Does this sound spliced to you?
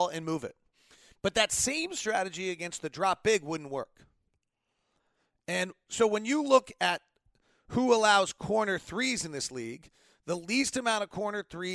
no; 0 cuts

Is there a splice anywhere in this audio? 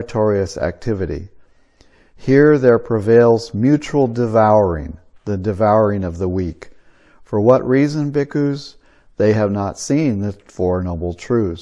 no; 0 cuts

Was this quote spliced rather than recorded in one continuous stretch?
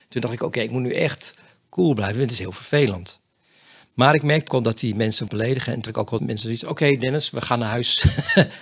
yes; 4 cuts; at 4.5 s, 5.3 s, 5.9 s, 6.2 s

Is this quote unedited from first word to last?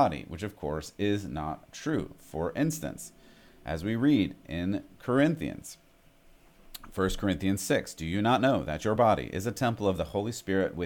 yes; 0 cuts

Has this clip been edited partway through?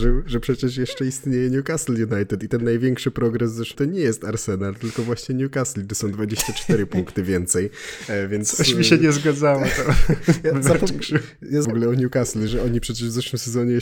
yes; 3 cuts; at 3.7 s, 11.6 s, 12.5 s

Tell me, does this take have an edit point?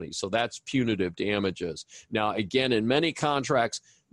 no; 0 cuts

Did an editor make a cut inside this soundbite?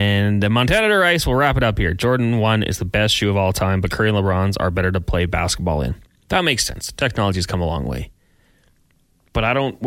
no; 0 cuts

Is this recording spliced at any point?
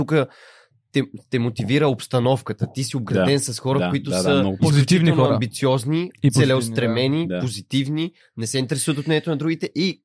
yes; 1 cut; at 4.6 s

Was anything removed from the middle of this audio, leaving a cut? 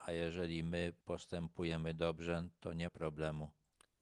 yes; 1 cut; at 2.9 s

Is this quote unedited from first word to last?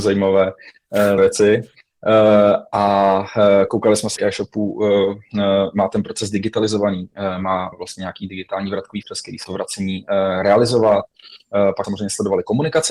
no; 6 cuts; at 1.2 s, 4.2 s, 7.7 s, 9.0 s, 9.4 s, 11.8 s

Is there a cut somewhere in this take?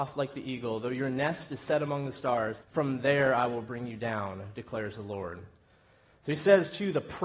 yes; 1 cut; at 2.6 s

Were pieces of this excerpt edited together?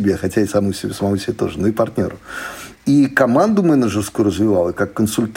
no; 0 cuts

